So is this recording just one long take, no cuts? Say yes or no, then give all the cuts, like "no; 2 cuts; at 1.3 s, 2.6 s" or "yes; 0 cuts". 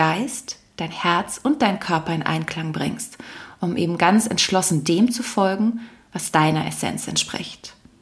yes; 0 cuts